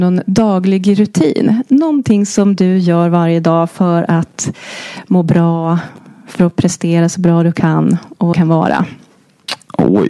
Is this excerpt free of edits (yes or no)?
no